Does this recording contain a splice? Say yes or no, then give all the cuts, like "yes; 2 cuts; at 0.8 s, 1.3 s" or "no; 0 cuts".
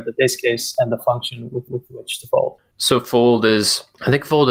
yes; 1 cut; at 1.7 s